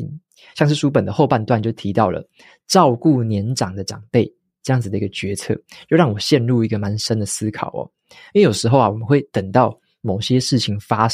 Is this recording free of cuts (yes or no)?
yes